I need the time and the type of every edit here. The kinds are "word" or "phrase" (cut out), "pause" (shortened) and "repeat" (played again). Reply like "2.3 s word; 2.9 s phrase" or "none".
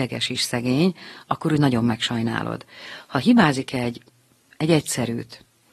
none